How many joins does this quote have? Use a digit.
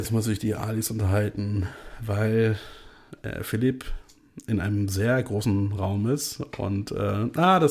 0